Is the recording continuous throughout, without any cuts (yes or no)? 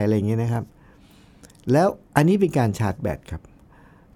no